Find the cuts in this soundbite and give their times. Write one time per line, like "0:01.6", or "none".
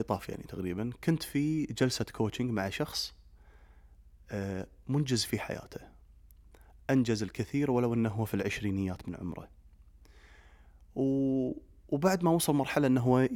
none